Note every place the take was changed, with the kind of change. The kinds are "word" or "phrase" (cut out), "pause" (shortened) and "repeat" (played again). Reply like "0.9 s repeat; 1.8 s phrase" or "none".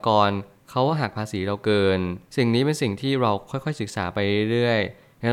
2.3 s pause